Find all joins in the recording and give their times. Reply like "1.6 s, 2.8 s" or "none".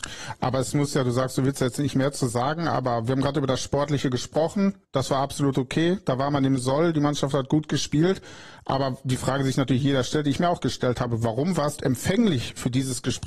4.8 s, 11.8 s